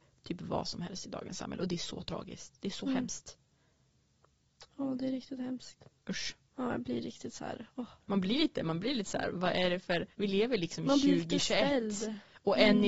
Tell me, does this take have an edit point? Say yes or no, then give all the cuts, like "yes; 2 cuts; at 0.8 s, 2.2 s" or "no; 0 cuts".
yes; 2 cuts; at 8.0 s, 10.1 s